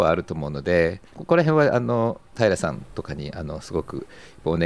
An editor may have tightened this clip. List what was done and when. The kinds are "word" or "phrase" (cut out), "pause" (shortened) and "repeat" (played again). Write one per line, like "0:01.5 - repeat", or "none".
0:01.1 - pause